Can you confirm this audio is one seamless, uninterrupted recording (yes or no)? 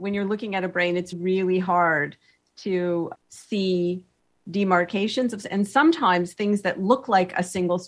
no